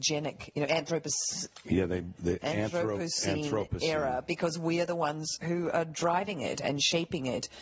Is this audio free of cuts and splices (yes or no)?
yes